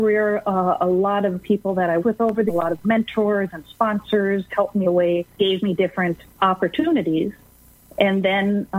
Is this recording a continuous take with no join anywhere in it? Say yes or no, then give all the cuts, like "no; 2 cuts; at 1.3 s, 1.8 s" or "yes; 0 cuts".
no; 8 cuts; at 1.4 s, 2.0 s, 2.5 s, 2.8 s, 4.5 s, 4.8 s, 5.4 s, 6.4 s